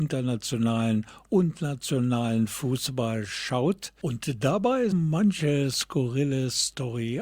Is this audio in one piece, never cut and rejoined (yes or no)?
no